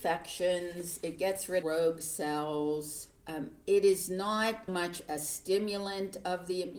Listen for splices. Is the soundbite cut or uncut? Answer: cut